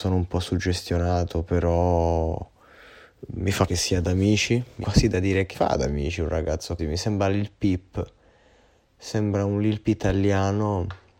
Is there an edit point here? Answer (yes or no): yes